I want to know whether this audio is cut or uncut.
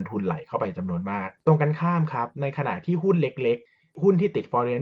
uncut